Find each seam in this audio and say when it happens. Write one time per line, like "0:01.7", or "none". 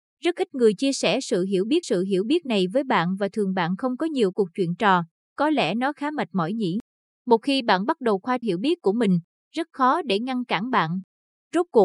0:01.8
0:04.3
0:08.4

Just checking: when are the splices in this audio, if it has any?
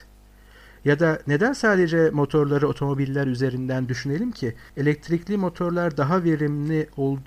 0:04.7

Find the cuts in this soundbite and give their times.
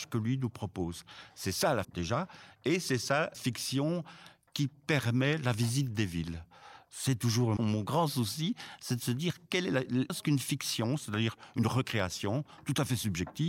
0:01.8
0:03.3
0:07.6
0:10.1

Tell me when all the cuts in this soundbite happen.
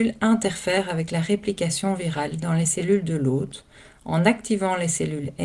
none

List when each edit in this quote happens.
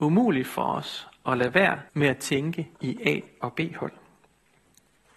0:01.9
0:02.7

